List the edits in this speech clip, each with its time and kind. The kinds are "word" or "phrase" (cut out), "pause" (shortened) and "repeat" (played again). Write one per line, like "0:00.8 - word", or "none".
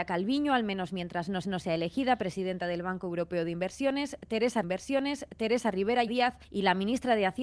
0:01.4 - repeat
0:04.6 - repeat
0:06.1 - word
0:06.4 - pause

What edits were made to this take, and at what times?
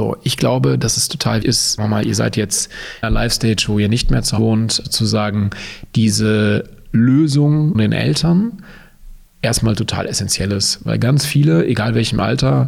0:01.4 - word
0:01.8 - word
0:03.0 - word
0:04.4 - word
0:04.8 - word
0:07.7 - word

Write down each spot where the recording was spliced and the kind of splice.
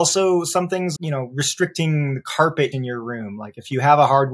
0:01.0 - word
0:02.7 - word

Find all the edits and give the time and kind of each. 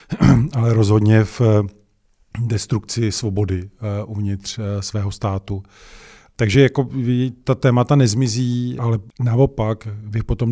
none

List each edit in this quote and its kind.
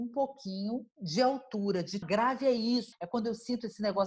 0:00.9 - pause
0:02.0 - word
0:02.9 - word

